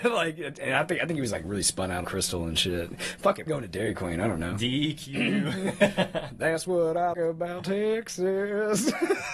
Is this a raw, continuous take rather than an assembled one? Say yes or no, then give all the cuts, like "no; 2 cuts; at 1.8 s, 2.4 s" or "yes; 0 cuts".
no; 3 cuts; at 2.0 s, 3.5 s, 7.1 s